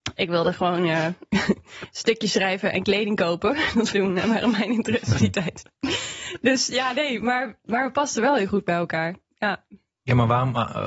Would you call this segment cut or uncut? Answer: cut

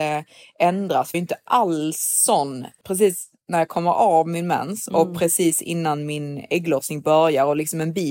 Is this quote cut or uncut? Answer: cut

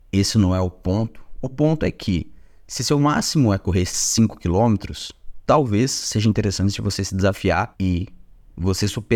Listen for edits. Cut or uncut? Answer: uncut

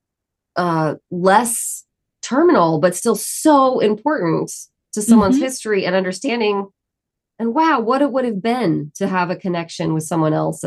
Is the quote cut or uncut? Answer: uncut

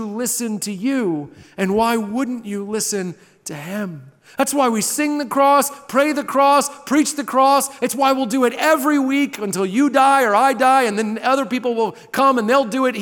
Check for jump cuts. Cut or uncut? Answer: uncut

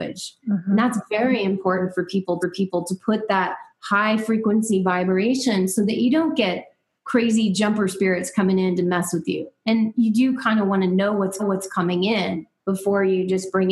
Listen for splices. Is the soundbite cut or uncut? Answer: cut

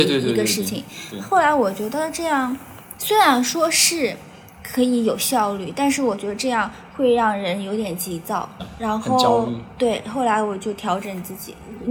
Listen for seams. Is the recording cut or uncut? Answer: cut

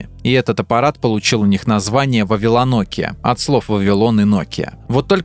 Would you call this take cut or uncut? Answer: uncut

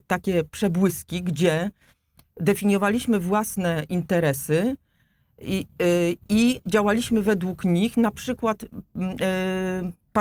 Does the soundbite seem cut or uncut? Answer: uncut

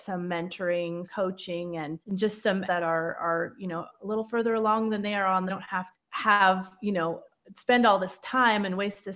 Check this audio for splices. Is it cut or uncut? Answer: cut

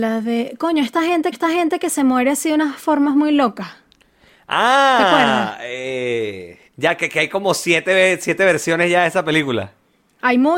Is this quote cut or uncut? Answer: cut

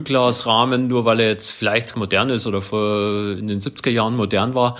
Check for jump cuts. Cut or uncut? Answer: cut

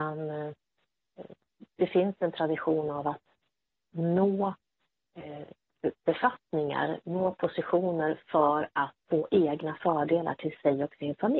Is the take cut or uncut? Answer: cut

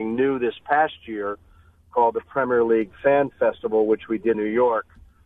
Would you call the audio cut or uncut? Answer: cut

